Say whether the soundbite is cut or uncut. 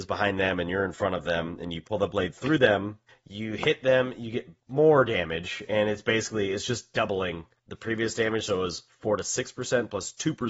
cut